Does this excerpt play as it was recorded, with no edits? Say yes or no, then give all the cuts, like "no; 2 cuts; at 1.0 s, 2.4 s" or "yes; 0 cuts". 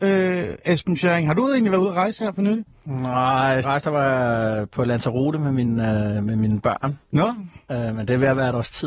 no; 1 cut; at 3.6 s